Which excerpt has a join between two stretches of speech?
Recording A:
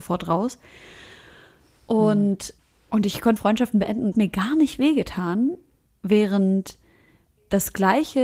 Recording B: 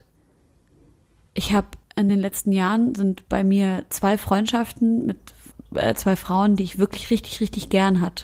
A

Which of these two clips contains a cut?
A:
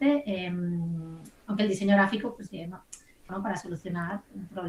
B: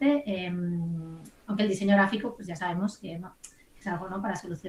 A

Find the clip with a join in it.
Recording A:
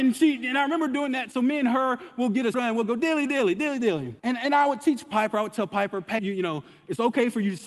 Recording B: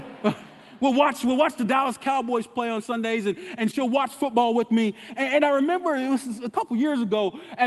A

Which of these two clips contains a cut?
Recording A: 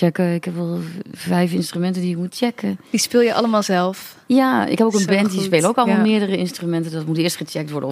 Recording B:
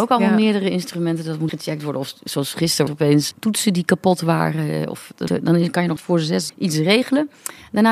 B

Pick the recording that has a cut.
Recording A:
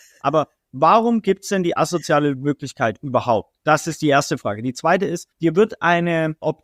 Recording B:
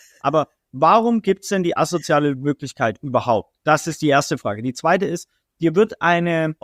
A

